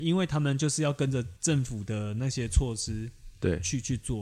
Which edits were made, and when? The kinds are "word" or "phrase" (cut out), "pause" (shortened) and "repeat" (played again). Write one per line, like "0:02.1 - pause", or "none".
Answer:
0:01.4 - pause